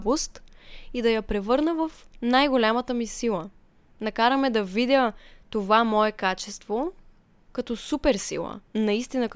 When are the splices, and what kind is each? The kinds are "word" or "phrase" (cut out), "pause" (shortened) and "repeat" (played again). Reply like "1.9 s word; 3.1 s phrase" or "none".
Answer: none